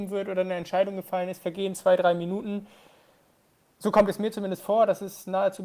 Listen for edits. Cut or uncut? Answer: uncut